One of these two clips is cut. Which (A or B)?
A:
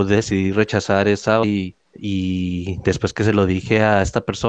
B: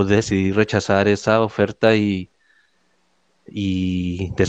A